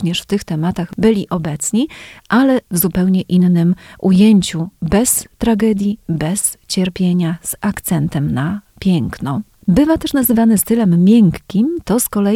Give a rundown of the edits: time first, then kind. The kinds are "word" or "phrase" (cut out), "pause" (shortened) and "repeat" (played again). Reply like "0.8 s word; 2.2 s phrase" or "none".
none